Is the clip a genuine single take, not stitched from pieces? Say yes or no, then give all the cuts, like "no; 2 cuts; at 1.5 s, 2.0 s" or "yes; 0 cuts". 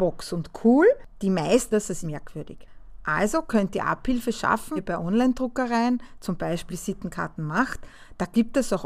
no; 4 cuts; at 1.7 s, 2.0 s, 4.8 s, 6.7 s